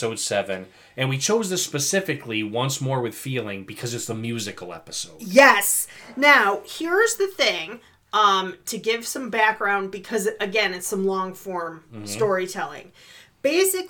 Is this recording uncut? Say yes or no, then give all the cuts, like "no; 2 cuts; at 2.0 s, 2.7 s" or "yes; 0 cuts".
yes; 0 cuts